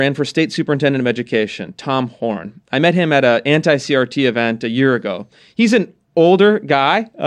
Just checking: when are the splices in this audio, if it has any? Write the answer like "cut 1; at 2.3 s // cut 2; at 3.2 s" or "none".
none